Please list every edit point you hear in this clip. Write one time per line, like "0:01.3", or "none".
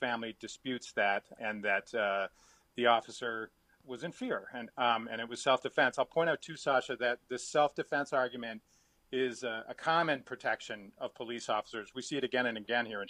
none